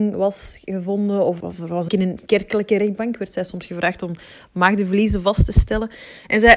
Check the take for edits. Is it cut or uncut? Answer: cut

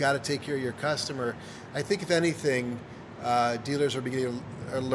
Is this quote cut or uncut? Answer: uncut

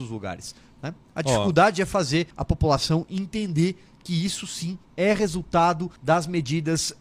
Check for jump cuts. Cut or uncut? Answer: cut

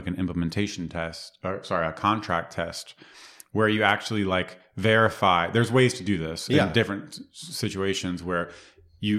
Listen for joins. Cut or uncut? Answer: uncut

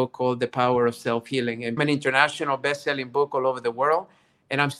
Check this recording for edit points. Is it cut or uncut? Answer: cut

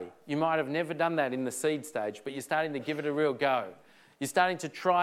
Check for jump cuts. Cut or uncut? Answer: uncut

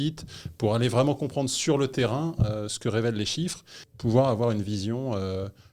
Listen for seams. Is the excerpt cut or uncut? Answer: uncut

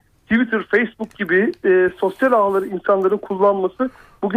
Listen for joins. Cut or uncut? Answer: uncut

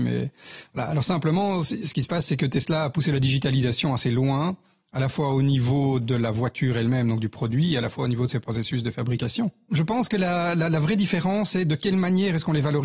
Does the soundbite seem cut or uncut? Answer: uncut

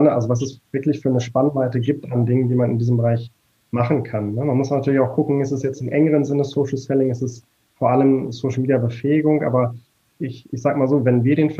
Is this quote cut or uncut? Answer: uncut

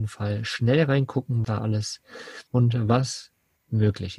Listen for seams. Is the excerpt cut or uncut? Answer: cut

